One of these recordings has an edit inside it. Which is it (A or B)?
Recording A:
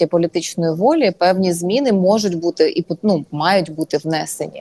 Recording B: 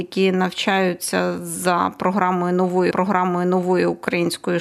B